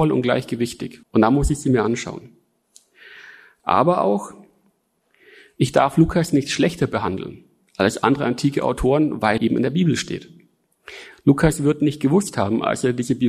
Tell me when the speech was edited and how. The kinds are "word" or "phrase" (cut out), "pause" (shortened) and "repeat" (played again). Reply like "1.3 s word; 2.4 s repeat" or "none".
1.0 s pause; 9.4 s word